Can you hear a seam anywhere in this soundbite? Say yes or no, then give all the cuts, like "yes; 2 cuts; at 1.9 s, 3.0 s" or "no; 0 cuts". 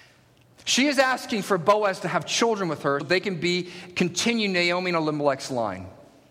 yes; 1 cut; at 3.0 s